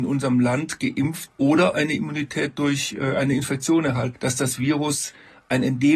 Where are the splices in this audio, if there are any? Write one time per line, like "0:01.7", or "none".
0:01.3
0:04.1

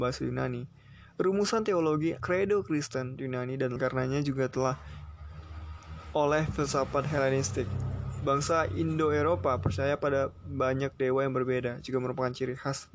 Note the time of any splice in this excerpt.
0:02.2
0:03.2
0:03.8

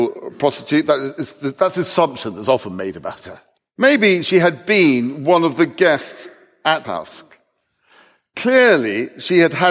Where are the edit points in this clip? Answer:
0:03.6
0:06.8

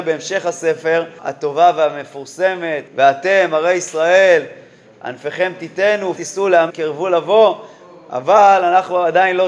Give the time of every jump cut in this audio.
0:01.2
0:02.9
0:06.2
0:06.7

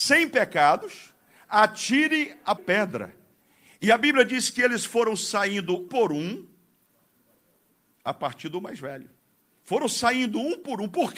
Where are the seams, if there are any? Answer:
0:02.6
0:05.9

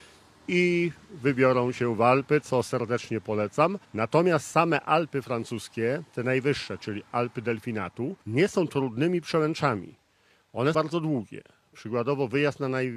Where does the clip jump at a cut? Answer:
0:03.8
0:08.2
0:10.7

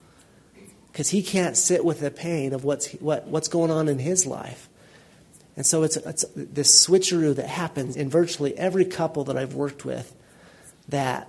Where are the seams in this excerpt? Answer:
0:07.9

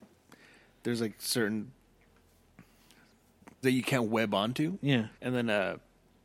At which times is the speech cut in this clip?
0:03.6
0:05.1

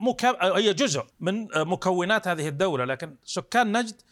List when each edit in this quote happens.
0:01.1

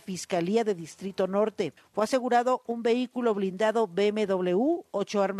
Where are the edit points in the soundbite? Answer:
0:01.8

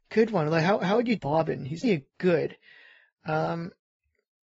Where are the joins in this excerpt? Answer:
0:01.2
0:01.8

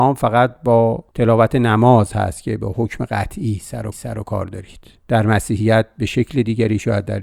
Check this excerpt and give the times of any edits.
0:03.9

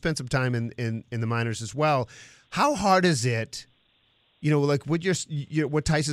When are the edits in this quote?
none

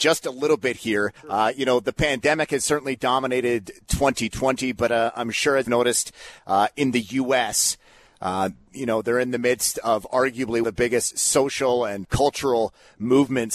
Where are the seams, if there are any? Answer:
0:01.2
0:05.6
0:10.6
0:11.1
0:12.0

